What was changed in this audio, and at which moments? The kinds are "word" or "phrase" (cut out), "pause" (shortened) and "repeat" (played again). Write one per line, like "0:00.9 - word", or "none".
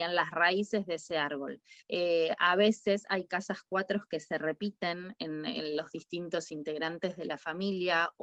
0:01.8 - pause